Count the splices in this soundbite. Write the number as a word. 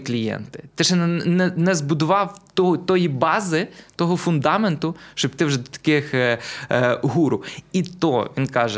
zero